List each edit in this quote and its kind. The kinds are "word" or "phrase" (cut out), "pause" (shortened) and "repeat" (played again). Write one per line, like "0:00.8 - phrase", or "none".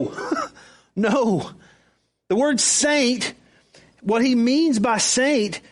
none